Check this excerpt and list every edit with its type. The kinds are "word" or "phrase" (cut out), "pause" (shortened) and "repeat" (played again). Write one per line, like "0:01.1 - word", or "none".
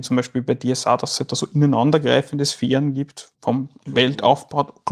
0:03.3 - pause